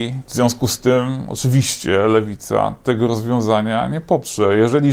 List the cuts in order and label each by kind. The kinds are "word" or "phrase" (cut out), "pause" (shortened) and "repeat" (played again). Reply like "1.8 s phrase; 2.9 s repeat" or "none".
none